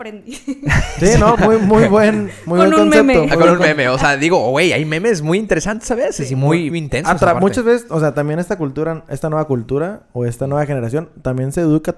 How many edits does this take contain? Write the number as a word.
two